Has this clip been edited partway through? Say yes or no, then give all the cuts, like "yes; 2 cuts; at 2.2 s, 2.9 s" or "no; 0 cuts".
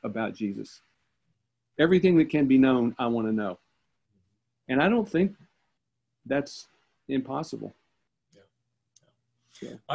no; 0 cuts